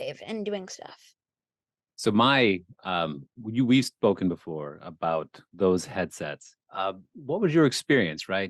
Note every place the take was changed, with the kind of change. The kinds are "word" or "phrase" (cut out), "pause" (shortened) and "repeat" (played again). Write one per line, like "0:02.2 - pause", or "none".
0:06.7 - pause